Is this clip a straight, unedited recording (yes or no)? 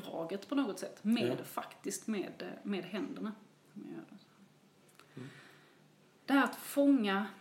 yes